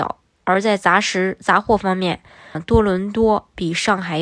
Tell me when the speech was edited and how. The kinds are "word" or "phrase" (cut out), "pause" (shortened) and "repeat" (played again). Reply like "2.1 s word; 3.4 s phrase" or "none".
2.5 s word